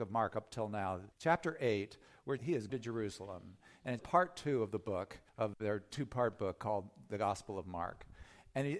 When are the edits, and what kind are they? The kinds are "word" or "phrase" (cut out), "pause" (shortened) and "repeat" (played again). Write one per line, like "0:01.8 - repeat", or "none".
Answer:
0:01.1 - pause
0:02.4 - phrase
0:02.7 - word
0:04.0 - word
0:05.3 - pause